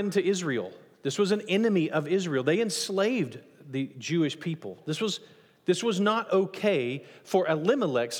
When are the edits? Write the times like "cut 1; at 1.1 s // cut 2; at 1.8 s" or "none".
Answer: none